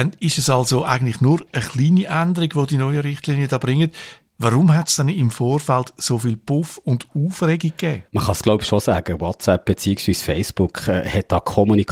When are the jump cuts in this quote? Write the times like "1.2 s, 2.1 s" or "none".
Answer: 8.1 s

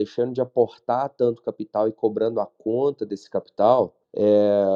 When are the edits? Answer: none

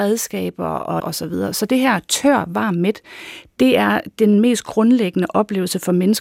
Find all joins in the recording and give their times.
1.0 s

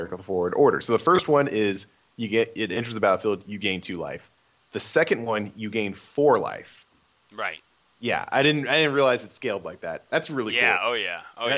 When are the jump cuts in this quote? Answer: none

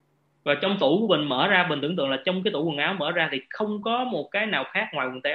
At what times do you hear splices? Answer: none

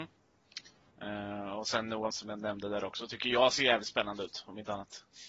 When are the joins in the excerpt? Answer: 2.1 s

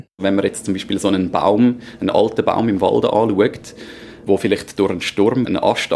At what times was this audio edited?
none

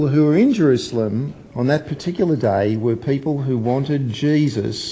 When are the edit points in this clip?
1.5 s

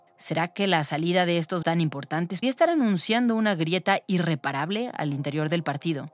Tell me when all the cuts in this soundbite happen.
1.6 s, 2.4 s

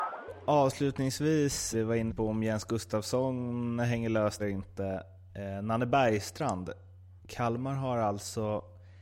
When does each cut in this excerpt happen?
1.7 s, 2.1 s, 4.4 s, 7.2 s

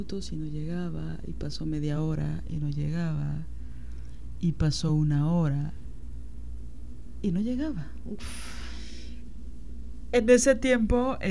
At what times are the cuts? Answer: none

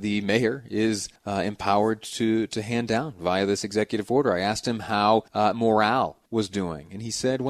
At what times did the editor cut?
1.2 s, 5.3 s, 6.3 s

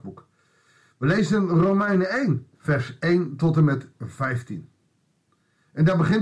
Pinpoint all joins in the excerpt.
2.5 s

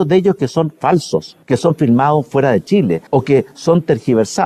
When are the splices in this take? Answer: 1.4 s, 3.1 s

